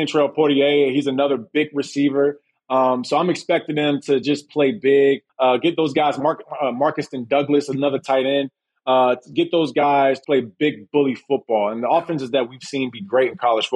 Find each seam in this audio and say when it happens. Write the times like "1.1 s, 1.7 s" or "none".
10.2 s